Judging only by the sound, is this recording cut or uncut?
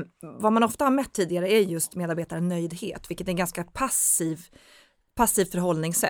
uncut